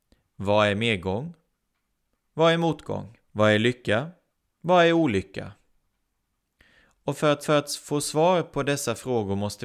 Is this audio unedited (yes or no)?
no